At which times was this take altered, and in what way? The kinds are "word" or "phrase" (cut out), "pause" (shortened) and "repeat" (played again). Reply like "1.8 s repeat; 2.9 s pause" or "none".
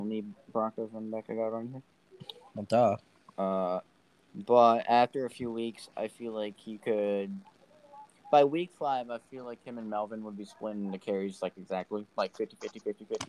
none